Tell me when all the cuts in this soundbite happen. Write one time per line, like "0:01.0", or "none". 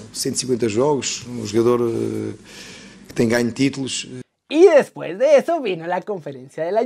none